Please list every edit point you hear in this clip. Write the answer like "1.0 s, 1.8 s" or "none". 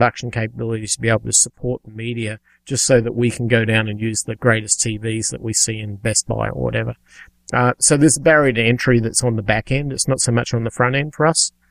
none